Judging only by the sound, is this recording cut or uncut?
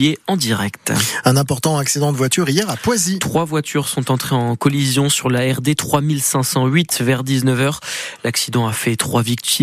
uncut